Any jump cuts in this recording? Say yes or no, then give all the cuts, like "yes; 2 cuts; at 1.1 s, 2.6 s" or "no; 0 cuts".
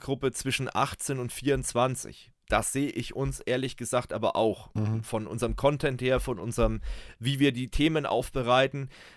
no; 0 cuts